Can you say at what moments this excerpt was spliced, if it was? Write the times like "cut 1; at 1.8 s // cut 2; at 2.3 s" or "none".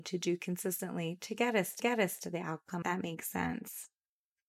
cut 1; at 1.8 s // cut 2; at 2.8 s